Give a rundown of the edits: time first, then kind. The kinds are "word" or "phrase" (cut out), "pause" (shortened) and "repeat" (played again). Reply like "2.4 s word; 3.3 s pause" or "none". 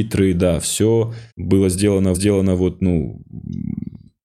1.3 s pause; 2.1 s repeat

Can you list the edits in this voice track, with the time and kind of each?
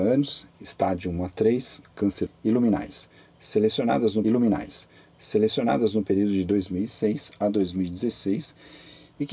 2.3 s word; 4.2 s repeat

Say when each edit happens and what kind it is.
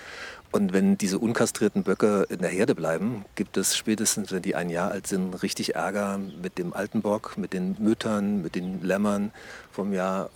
none

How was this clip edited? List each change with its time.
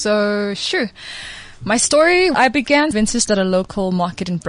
2.3 s word; 2.9 s word; 3.3 s word

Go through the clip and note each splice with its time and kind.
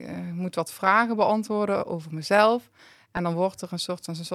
none

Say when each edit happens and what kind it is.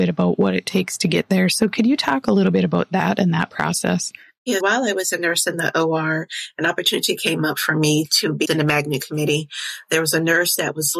4.6 s word; 8.4 s word

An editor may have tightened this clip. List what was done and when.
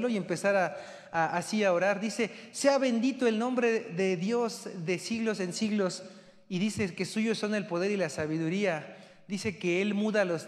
none

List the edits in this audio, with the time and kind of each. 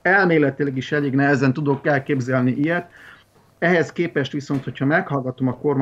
none

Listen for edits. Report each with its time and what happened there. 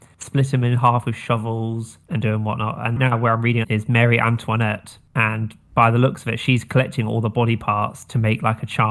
3.0 s phrase; 3.6 s phrase

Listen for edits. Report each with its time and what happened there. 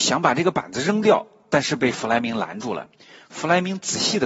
3.0 s pause

